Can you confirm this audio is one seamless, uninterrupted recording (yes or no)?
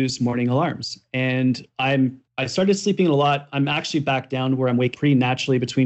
no